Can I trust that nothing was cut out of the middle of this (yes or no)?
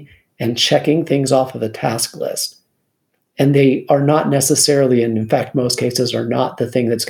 yes